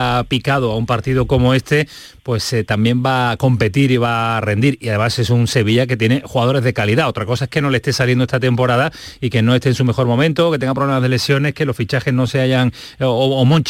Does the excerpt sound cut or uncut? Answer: uncut